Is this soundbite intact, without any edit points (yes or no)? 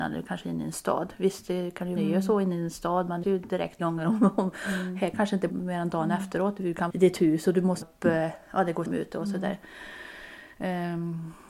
no